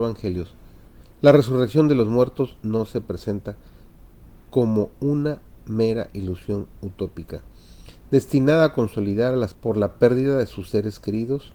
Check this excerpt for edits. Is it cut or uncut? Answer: cut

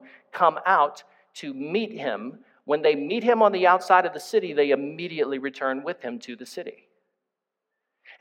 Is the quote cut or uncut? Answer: uncut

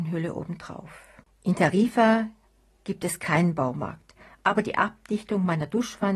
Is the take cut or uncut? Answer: uncut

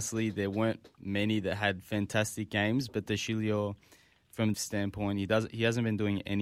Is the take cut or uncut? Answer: cut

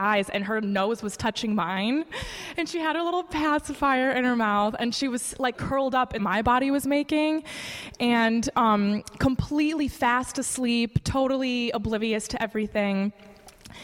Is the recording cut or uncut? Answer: cut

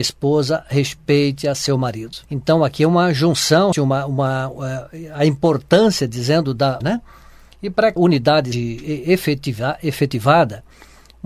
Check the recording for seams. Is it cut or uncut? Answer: cut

